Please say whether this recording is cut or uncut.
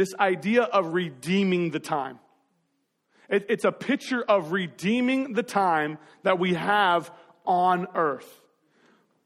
uncut